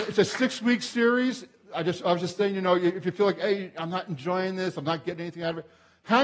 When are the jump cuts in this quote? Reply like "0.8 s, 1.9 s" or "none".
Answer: none